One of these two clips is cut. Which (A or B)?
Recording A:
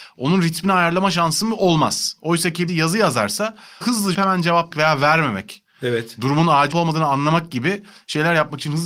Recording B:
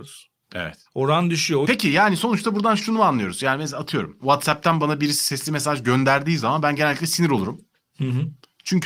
A